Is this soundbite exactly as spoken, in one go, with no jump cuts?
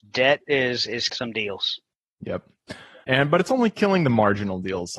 no; 2 cuts; at 1.1 s, 3.0 s

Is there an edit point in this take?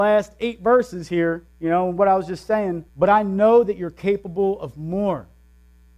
yes; 2 cuts; at 1.5 s, 2.9 s

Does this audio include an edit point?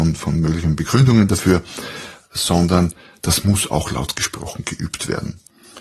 no; 0 cuts

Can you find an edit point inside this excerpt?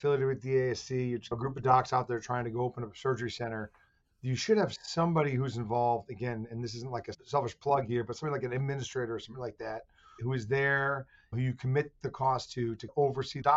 no; 0 cuts

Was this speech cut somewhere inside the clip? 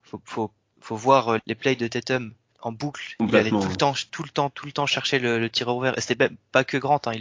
yes; 2 cuts; at 1.4 s, 2.5 s

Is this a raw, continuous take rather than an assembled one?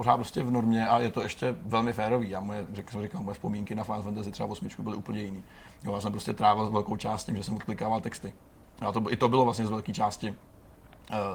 yes; 0 cuts

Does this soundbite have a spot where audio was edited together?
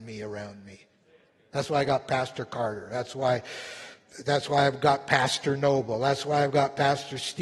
no; 0 cuts

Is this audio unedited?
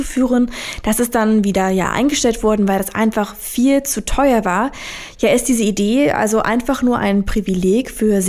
yes; 0 cuts

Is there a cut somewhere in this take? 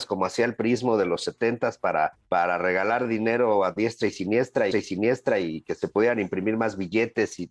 yes; 1 cut; at 4.7 s

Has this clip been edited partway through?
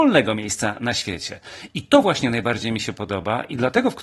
no; 0 cuts

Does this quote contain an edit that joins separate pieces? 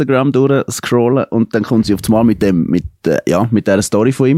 no; 0 cuts

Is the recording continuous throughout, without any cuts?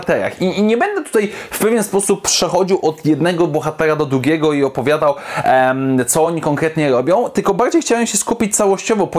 yes; 0 cuts

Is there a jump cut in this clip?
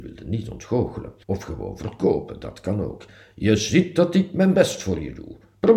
yes; 1 cut; at 1.2 s

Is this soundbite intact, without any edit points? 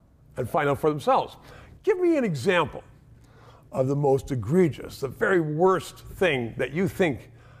yes; 0 cuts

